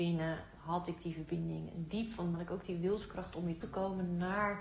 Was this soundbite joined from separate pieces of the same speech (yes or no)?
yes